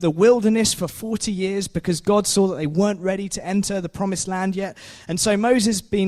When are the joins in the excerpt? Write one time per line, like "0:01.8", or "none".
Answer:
none

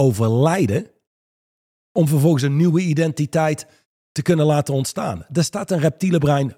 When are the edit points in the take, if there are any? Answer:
none

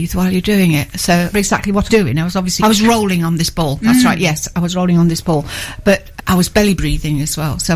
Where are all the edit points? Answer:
0:01.3
0:01.9
0:02.6
0:06.2

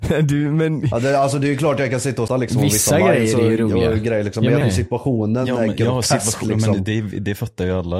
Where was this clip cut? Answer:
0:02.3
0:04.6

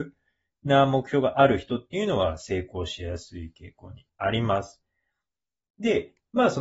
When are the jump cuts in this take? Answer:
0:04.1

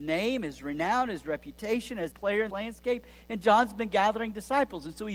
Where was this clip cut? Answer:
0:02.1
0:02.5

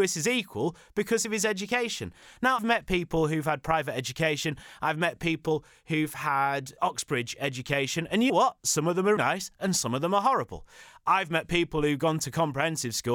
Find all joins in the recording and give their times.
0:02.6
0:06.8
0:08.3
0:09.2

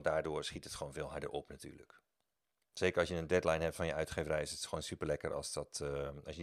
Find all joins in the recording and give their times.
none

